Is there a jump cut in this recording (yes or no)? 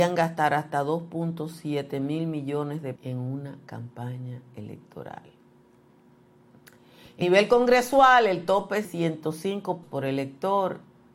yes